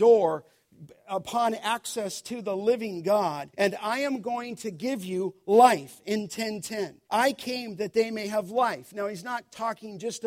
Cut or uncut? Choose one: cut